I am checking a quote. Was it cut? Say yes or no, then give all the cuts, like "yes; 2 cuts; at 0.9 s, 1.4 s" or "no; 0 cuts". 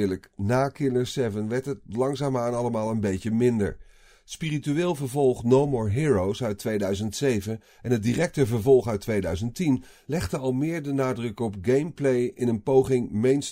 no; 0 cuts